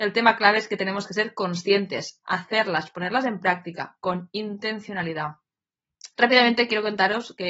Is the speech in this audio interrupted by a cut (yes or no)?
yes